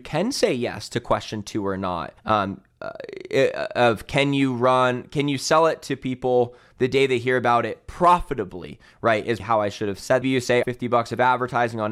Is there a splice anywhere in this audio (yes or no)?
yes